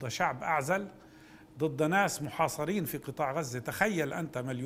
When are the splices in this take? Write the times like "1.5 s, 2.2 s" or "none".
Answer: none